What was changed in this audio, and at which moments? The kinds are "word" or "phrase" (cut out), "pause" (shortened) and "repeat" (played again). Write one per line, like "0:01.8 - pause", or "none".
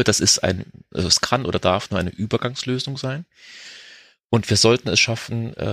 none

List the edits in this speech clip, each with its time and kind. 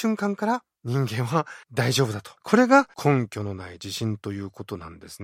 0:01.6 - pause
0:02.4 - pause
0:02.9 - pause

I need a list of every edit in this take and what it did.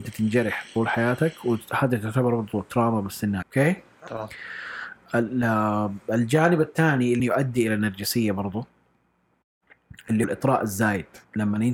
0:03.4 - phrase
0:07.2 - word
0:10.2 - word

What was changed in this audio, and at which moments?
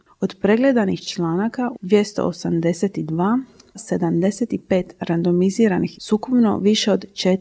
0:01.7 - phrase
0:03.7 - phrase
0:05.9 - word

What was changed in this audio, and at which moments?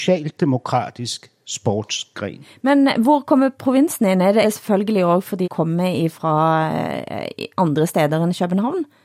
0:04.4 - word
0:05.4 - phrase

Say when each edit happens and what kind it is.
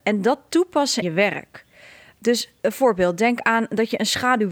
0:01.0 - word

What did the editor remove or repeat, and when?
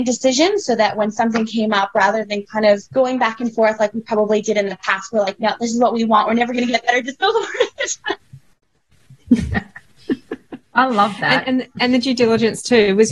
0:02.9 - pause

